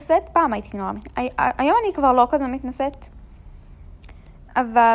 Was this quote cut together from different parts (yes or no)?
no